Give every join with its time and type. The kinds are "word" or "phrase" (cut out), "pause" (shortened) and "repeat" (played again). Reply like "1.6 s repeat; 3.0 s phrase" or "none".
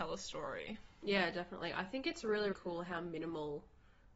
2.5 s word